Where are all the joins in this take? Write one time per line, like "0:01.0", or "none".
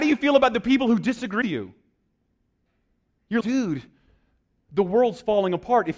0:01.4
0:03.4